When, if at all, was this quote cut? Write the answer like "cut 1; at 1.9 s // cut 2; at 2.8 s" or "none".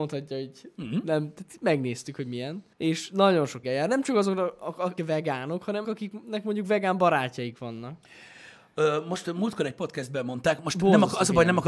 cut 1; at 2.7 s // cut 2; at 3.6 s // cut 3; at 5.0 s // cut 4; at 5.8 s